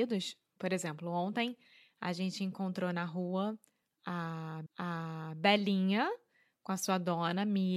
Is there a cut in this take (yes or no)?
yes